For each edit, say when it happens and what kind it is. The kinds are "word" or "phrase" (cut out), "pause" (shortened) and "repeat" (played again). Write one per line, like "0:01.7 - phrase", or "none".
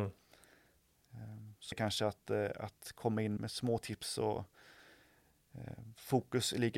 0:01.7 - word
0:03.4 - word